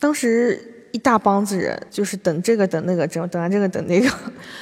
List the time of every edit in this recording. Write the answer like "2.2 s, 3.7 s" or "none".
1.9 s

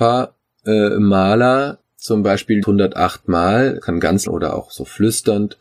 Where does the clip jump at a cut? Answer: 1.8 s, 2.6 s, 3.8 s, 4.3 s

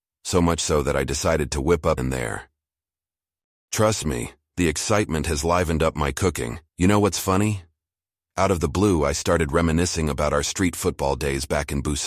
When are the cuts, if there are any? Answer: 2.0 s, 6.7 s

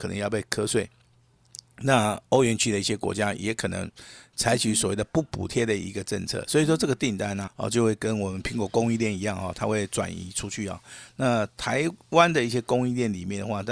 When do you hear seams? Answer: 7.5 s

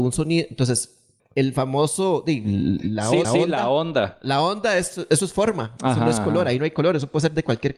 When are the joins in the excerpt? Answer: 1.2 s, 3.2 s

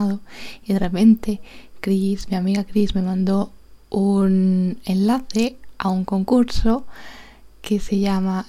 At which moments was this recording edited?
none

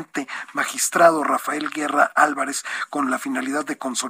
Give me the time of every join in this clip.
none

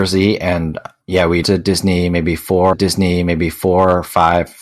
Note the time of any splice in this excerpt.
1.4 s, 2.7 s

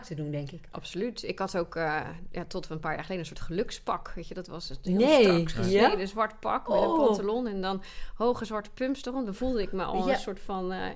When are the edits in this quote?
none

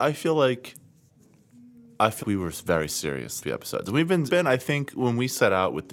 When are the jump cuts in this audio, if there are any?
2.2 s, 3.4 s, 4.3 s

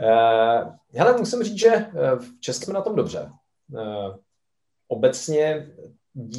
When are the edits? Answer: 2.6 s

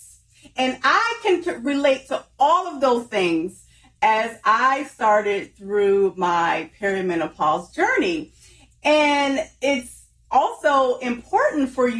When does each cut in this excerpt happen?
none

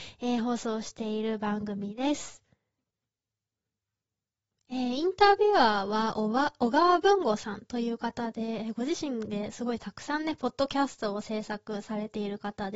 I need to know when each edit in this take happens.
none

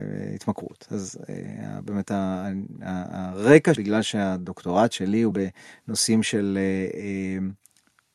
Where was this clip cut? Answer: 3.8 s, 5.3 s

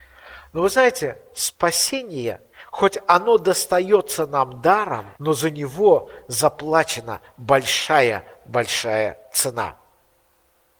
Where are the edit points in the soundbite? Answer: 2.5 s, 5.1 s

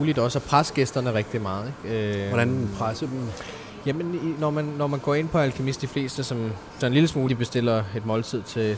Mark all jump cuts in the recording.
6.8 s, 7.3 s

